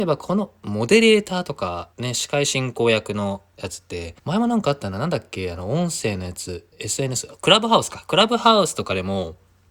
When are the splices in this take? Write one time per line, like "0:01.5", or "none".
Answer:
0:01.9
0:04.2
0:06.7